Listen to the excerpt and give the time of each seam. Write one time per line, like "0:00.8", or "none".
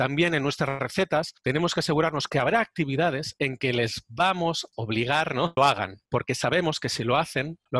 0:01.4
0:04.7
0:05.6
0:06.1

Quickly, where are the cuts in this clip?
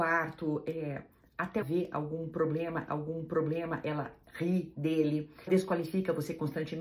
0:01.6
0:02.9
0:05.5

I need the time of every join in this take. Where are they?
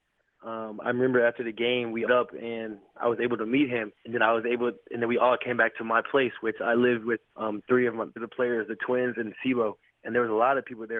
0:02.1
0:04.0
0:07.3
0:08.2

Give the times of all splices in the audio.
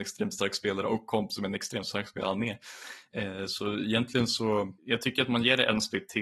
0:04.8

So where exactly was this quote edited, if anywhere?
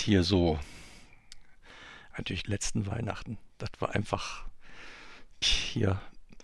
0:02.4
0:05.4

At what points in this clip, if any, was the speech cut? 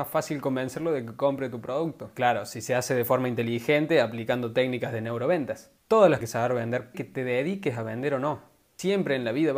0:05.8
0:06.2
0:06.9

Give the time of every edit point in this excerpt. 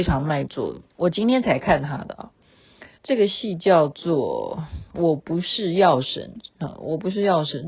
0:00.9
0:02.9

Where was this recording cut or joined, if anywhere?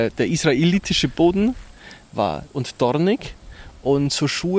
0:02.5

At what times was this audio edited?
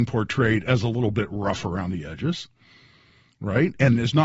none

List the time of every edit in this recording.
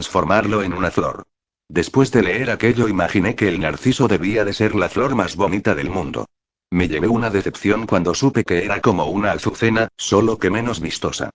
none

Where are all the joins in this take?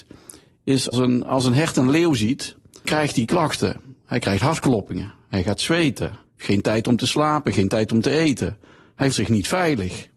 0:00.9
0:02.8
0:06.3
0:09.1

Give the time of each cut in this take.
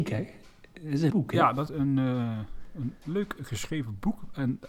0:01.1
0:01.7

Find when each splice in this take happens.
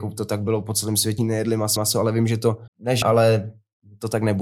0:01.2
0:01.8
0:02.7
0:03.0

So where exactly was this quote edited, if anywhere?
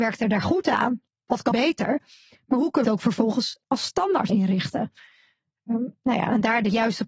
0:01.5
0:02.8
0:03.6
0:04.3

